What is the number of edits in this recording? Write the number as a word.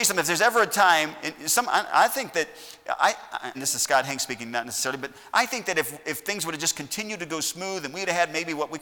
one